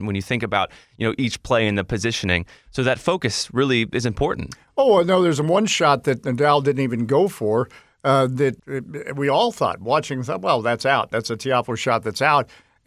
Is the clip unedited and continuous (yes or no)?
yes